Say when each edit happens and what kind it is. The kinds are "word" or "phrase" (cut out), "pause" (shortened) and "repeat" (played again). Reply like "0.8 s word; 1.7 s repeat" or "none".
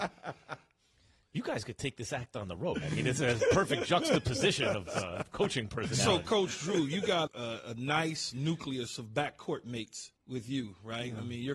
7.3 s word; 10.2 s pause